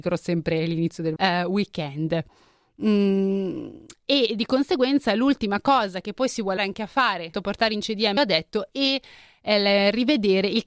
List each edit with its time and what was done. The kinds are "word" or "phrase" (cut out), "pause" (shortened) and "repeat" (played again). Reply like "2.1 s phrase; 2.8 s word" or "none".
1.2 s word; 6.6 s word; 7.3 s word; 8.2 s word

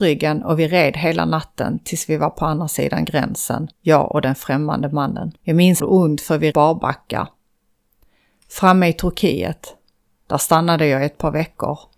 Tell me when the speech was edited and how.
3.7 s pause; 5.4 s pause; 5.8 s phrase; 6.5 s word

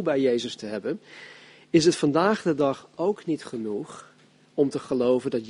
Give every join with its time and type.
none

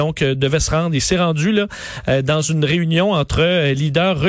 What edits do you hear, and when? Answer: none

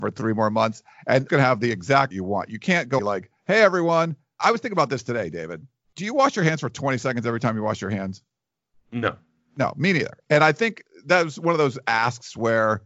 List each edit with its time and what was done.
1.3 s phrase; 2.1 s phrase; 3.0 s phrase; 3.4 s pause; 4.4 s word; 5.8 s pause

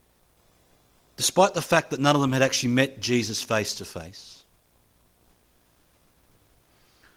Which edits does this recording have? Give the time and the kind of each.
none

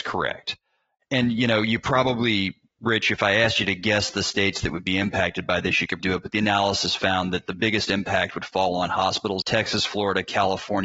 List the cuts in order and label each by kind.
6.0 s word; 9.4 s word

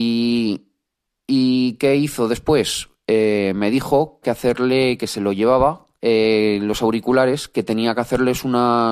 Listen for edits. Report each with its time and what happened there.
4.2 s phrase; 5.9 s pause

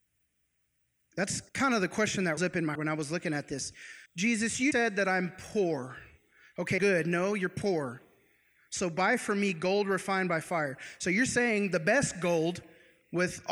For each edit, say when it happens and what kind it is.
1.5 s pause; 2.4 s word; 2.8 s word; 4.1 s pause; 4.7 s word; 6.8 s phrase

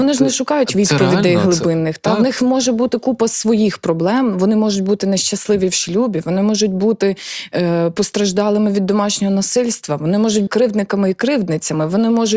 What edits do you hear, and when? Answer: 10.5 s word

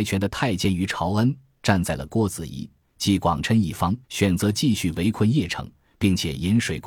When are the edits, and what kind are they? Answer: 4.0 s pause

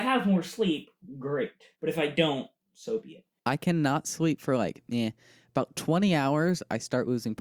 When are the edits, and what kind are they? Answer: 1.8 s pause

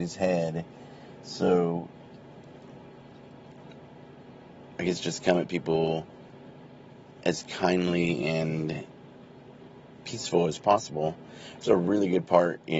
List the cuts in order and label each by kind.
none

